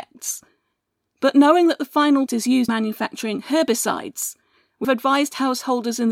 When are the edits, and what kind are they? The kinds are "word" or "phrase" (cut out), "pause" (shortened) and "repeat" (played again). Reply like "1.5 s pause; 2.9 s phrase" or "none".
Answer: 2.3 s word; 2.7 s word; 4.8 s word

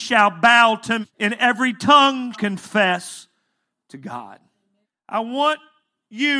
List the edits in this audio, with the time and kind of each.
1.0 s word; 2.3 s word; 4.8 s pause

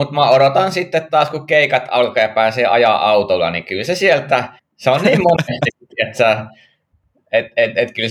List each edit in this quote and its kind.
4.6 s pause

